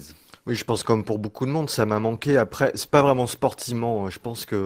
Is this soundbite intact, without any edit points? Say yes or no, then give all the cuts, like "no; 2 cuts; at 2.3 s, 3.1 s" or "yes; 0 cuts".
yes; 0 cuts